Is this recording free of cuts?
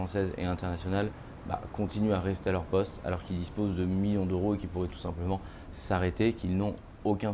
yes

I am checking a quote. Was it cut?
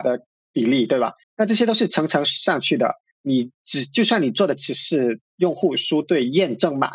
yes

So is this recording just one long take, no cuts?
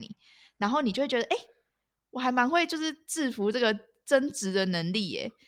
yes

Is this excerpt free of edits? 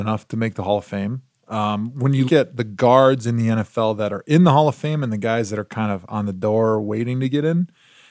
no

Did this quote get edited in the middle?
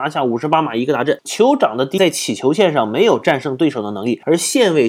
yes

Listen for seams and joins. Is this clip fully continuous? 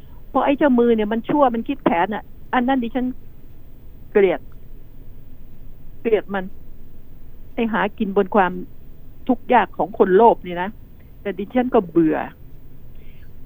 yes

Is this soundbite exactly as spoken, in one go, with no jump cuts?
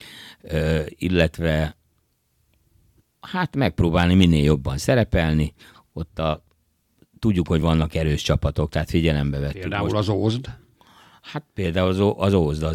yes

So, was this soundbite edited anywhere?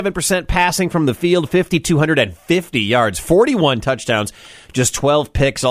no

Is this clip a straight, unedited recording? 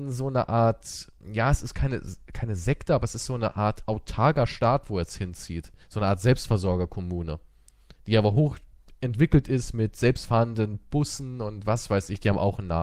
no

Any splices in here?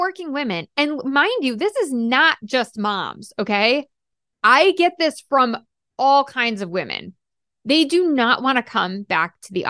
no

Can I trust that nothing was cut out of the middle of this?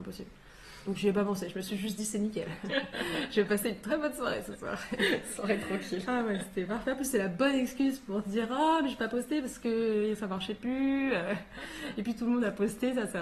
yes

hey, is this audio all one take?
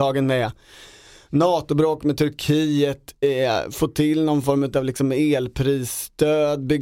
yes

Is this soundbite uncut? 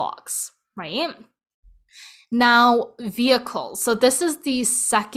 yes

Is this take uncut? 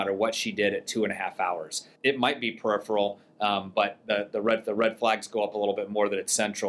no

